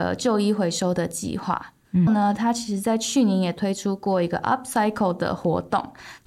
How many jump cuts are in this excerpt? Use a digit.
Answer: 1